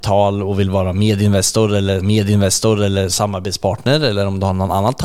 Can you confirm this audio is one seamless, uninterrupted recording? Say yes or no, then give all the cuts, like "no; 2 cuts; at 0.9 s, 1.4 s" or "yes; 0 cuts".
no; 1 cut; at 2.0 s